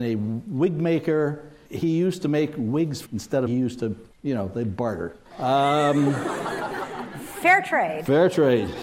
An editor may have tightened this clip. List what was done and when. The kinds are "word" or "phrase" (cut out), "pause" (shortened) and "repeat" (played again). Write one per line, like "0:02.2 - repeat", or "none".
0:01.7 - word
0:03.0 - phrase
0:03.5 - word
0:04.1 - pause
0:05.2 - pause